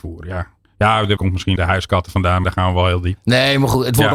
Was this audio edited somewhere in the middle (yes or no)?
yes